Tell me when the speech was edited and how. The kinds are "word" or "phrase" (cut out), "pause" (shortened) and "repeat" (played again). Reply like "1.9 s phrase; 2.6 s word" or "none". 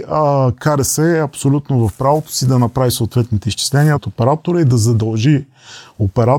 3.9 s phrase